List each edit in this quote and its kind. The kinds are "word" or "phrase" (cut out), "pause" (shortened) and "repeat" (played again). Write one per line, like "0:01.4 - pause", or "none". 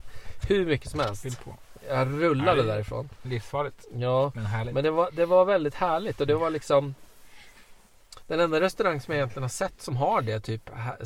none